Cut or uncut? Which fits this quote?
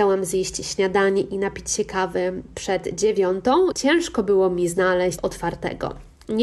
cut